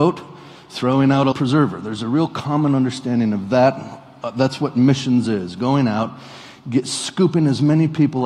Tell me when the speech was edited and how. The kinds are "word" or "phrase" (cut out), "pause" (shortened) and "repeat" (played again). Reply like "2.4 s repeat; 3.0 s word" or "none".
1.3 s word

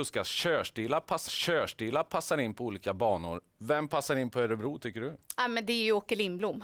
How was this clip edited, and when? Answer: 1.3 s repeat

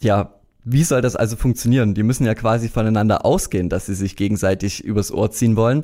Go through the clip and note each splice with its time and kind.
none

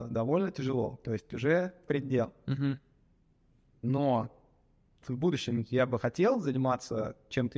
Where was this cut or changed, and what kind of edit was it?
1.9 s word; 5.0 s word

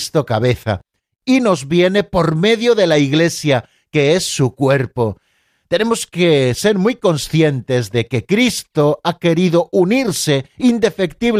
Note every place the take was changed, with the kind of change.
none

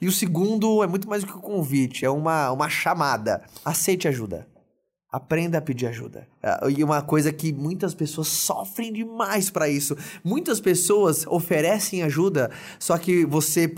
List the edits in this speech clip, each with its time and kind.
none

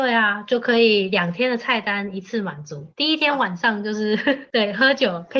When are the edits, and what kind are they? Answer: 2.9 s pause

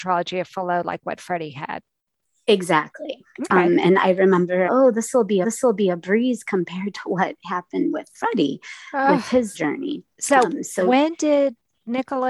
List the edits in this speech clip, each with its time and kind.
4.7 s phrase; 5.4 s repeat; 9.5 s word; 10.1 s pause

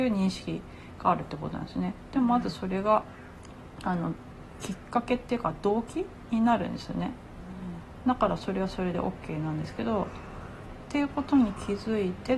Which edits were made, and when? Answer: none

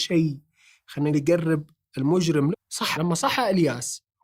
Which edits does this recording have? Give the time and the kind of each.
1.1 s word; 2.5 s word; 2.9 s word

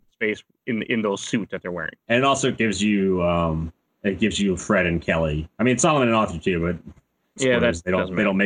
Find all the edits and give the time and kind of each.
2.0 s pause

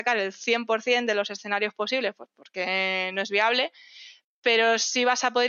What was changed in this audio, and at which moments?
none

